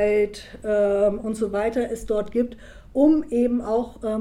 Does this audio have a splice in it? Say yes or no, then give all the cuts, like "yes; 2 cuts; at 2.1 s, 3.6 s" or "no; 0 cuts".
no; 0 cuts